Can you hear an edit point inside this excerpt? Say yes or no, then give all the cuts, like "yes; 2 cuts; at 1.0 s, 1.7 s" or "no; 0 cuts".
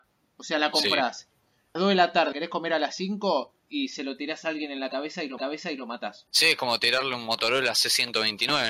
yes; 4 cuts; at 1.8 s, 2.3 s, 3.6 s, 5.4 s